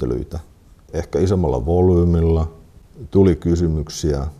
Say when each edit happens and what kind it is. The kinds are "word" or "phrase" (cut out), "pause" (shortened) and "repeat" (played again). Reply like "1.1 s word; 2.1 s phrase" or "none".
none